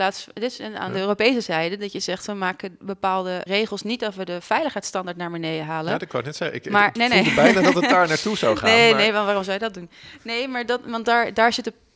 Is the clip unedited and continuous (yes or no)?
no